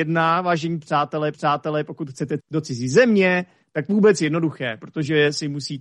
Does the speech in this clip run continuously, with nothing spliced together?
no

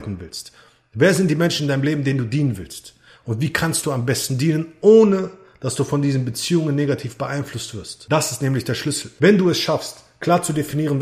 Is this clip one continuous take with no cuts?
yes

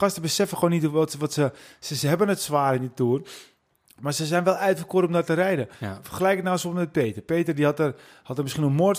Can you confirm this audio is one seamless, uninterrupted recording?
yes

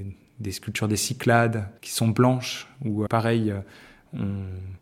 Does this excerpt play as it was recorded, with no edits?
no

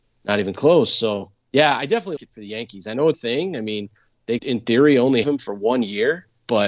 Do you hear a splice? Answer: yes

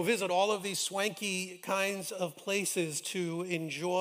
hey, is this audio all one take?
yes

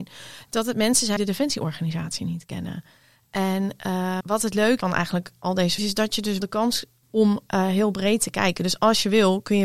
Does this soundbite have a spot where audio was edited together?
yes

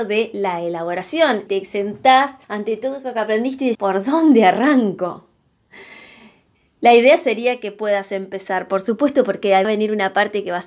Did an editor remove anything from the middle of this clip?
yes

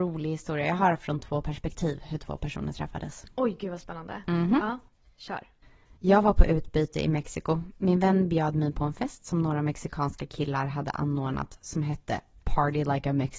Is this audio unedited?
no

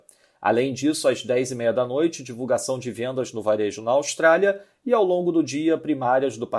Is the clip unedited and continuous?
yes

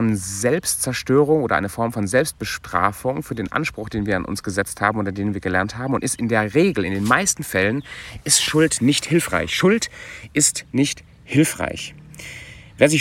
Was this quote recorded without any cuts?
yes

